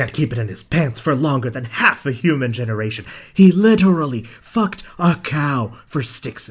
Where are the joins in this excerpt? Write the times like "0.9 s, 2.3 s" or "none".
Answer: none

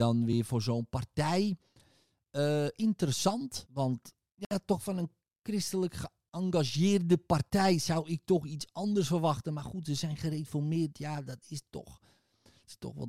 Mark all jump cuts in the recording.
none

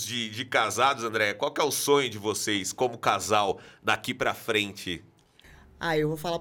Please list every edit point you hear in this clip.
none

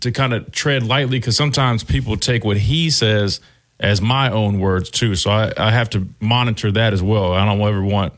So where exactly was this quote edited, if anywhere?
none

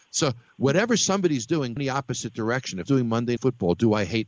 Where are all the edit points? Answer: 1.8 s, 2.9 s, 3.4 s

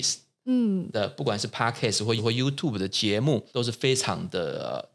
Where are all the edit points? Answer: 2.2 s, 3.5 s

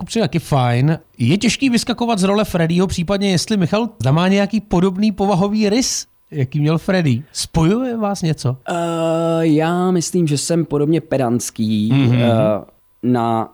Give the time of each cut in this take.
4.0 s, 7.3 s, 8.6 s

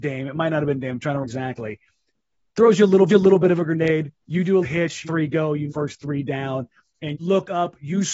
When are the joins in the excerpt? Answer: 1.2 s, 3.1 s, 4.2 s, 4.6 s, 5.0 s, 5.7 s, 7.1 s

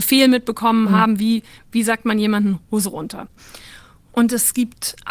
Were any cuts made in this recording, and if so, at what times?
none

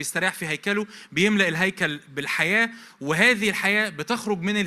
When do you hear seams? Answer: none

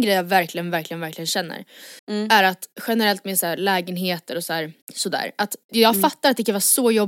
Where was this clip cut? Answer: 2.0 s, 4.8 s, 5.7 s

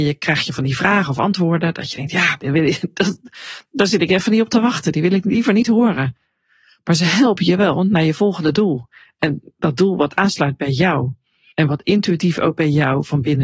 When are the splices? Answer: none

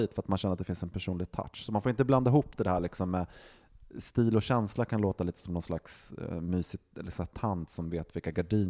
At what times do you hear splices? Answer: none

